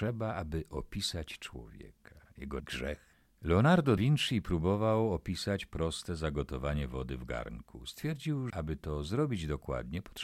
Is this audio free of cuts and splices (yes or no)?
no